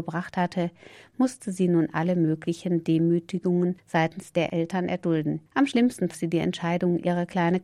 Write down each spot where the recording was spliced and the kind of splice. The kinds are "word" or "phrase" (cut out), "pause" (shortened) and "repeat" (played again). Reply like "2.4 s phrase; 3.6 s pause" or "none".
5.5 s pause; 6.1 s word